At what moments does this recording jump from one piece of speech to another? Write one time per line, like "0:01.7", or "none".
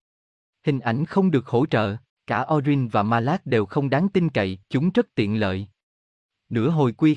0:02.1
0:04.6